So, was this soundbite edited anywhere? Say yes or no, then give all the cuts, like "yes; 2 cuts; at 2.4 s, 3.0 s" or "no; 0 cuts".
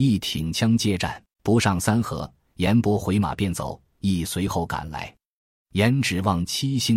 yes; 1 cut; at 1.3 s